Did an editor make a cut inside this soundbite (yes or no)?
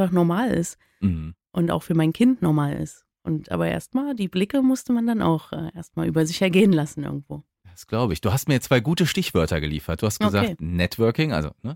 no